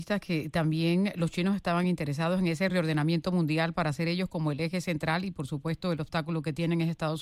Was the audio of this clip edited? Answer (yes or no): no